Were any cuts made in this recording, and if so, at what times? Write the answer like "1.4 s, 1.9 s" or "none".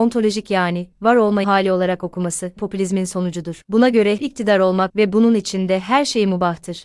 1.4 s, 2.6 s, 4.2 s, 4.9 s